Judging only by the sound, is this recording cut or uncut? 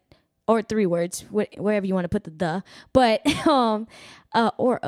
uncut